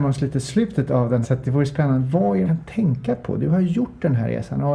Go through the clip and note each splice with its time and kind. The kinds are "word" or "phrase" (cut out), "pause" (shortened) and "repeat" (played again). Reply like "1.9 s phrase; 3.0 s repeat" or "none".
1.2 s word; 2.4 s word